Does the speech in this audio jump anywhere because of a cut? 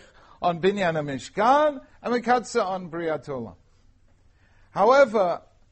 no; 0 cuts

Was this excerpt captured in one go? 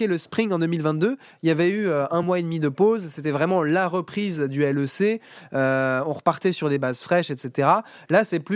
yes; 0 cuts

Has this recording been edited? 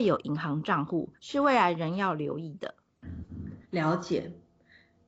yes; 2 cuts; at 1.2 s, 3.6 s

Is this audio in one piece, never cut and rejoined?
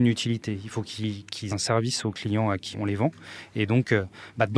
no; 2 cuts; at 1.5 s, 2.7 s

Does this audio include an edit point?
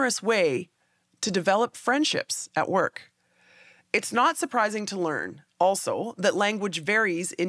no; 0 cuts

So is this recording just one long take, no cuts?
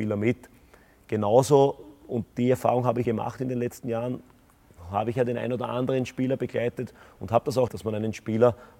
no; 2 cuts; at 3.0 s, 7.7 s

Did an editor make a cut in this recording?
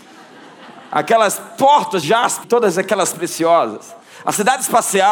yes; 3 cuts; at 2.0 s, 2.4 s, 3.1 s

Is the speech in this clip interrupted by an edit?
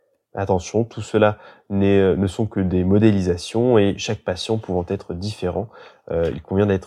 no; 0 cuts

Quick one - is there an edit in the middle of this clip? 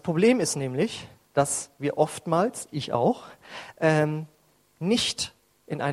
no; 0 cuts

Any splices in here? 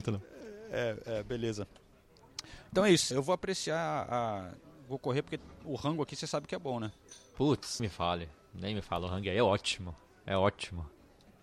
yes; 2 cuts; at 3.1 s, 7.8 s

